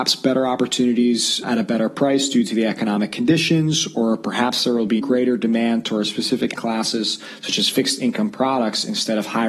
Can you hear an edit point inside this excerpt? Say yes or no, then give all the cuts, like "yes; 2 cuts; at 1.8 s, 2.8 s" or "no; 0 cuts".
yes; 3 cuts; at 1.4 s, 5.0 s, 6.6 s